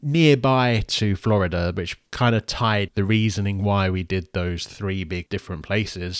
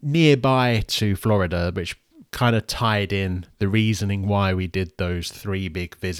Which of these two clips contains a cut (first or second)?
first